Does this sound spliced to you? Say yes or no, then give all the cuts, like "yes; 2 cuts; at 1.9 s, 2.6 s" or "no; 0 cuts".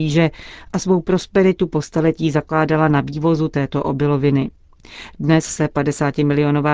no; 0 cuts